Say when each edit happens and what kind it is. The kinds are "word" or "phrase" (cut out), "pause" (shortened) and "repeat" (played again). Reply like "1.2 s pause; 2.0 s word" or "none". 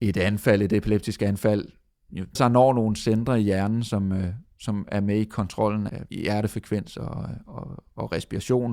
2.4 s word; 5.9 s word